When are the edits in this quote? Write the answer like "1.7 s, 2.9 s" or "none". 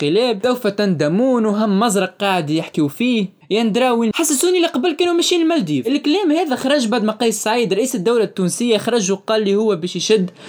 4.1 s